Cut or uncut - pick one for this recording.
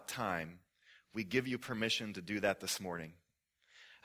uncut